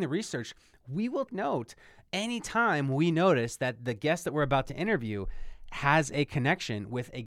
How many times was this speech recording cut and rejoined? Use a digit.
1